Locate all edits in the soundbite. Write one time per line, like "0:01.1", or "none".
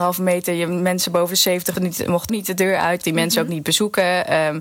0:01.8
0:02.3
0:03.0